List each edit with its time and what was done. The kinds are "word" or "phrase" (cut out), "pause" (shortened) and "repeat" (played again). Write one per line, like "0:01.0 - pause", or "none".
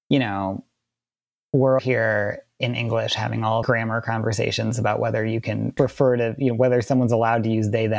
0:01.8 - word
0:03.6 - word